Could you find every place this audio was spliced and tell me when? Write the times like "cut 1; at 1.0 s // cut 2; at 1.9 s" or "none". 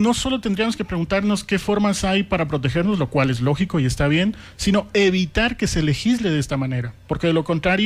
none